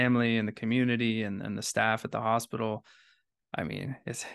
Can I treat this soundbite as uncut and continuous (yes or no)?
yes